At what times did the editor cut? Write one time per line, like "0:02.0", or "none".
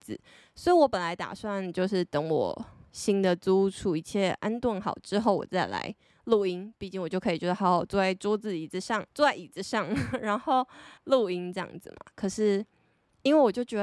0:09.1
0:11.0